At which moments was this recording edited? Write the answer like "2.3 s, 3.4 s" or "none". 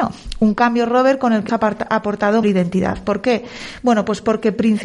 1.5 s, 2.4 s